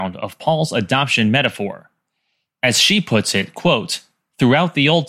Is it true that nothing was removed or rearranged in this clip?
yes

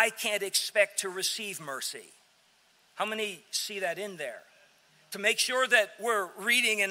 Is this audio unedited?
yes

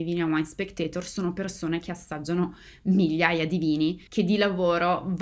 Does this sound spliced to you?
yes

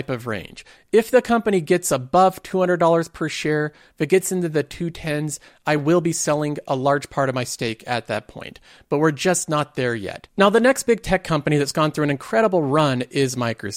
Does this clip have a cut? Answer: no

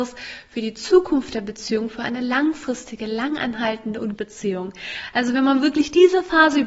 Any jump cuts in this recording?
yes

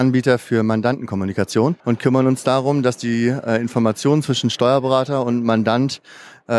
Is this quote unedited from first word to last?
no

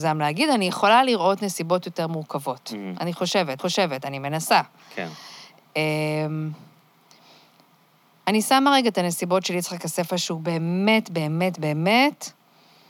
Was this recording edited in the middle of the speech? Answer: yes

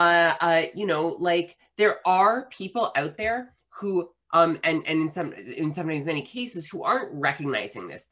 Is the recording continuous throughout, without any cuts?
yes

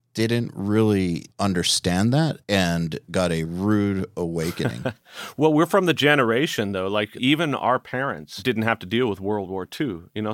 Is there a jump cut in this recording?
yes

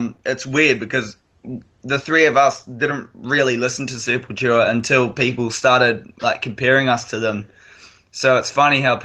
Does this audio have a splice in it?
no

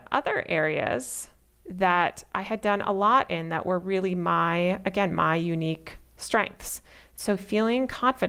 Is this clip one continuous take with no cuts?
yes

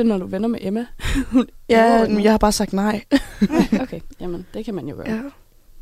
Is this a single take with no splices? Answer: no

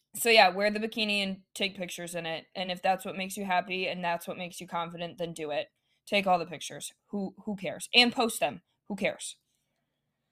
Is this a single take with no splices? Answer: yes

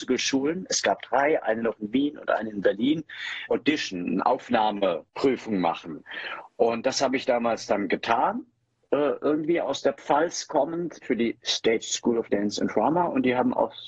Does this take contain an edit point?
yes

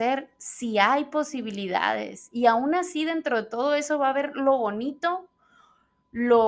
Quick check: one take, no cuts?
yes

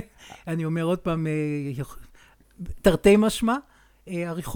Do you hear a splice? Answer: no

